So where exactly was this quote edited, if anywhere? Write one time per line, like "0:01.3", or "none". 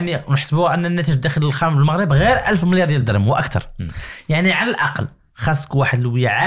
none